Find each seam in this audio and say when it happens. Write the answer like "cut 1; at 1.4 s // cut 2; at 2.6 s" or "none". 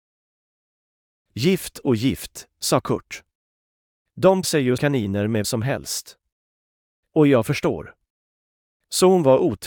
cut 1; at 4.4 s // cut 2; at 4.8 s // cut 3; at 5.4 s